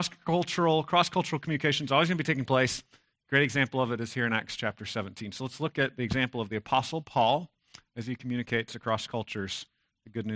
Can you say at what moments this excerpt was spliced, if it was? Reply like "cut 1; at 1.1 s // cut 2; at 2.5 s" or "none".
none